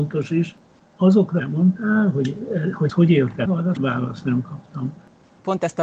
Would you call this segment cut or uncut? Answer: cut